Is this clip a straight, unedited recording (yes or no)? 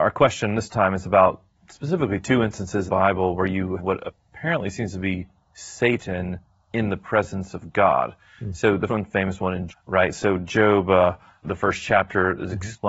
no